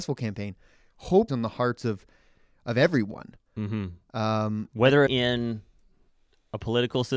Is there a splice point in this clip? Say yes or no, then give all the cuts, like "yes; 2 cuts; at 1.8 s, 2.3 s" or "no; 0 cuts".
yes; 3 cuts; at 1.3 s, 3.5 s, 5.1 s